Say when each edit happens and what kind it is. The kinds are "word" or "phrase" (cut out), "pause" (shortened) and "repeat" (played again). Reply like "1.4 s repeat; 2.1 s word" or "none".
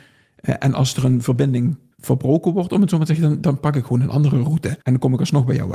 1.9 s pause; 4.8 s pause